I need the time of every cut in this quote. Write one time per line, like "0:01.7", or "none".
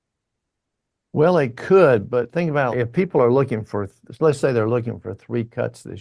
0:02.7